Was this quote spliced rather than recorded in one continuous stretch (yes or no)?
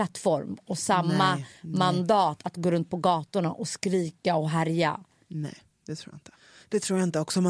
no